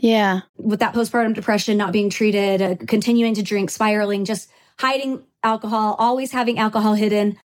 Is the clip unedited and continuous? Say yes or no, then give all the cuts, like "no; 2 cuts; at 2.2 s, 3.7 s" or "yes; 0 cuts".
yes; 0 cuts